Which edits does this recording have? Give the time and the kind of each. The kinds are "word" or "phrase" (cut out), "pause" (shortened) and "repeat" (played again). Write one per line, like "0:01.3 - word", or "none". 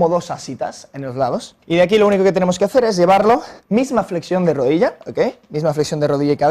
0:01.6 - pause
0:03.6 - pause